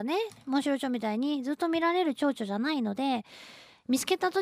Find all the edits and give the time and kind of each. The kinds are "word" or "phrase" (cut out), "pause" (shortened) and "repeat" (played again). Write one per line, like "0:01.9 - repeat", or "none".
none

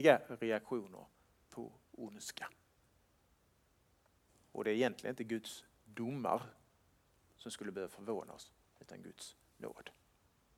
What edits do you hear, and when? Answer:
none

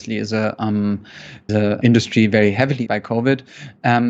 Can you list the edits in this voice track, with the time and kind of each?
0:01.5 - word
0:01.8 - word
0:02.9 - word

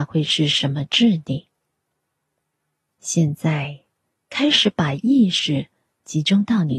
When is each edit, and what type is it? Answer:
none

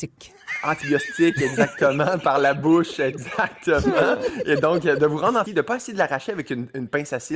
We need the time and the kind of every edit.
0:05.5 - word

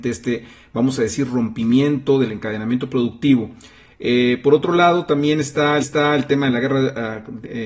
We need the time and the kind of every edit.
0:05.8 - repeat

